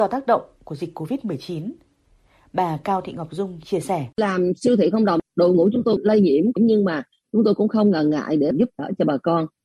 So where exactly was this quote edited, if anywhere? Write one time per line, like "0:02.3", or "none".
0:04.1